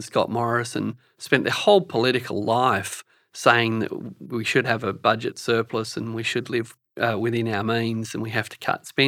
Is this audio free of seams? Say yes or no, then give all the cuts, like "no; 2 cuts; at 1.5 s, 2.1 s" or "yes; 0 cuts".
yes; 0 cuts